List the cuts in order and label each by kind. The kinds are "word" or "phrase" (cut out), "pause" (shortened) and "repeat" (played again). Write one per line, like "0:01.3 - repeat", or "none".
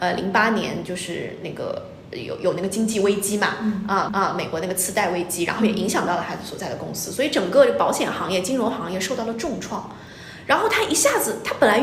0:04.1 - repeat